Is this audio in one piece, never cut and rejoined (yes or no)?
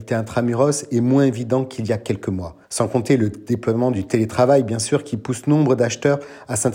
no